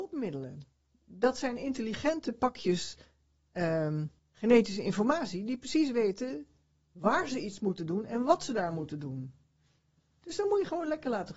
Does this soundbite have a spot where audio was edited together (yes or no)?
yes